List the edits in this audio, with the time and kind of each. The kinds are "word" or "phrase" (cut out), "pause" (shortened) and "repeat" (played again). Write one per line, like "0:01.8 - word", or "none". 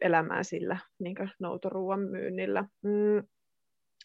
0:02.7 - pause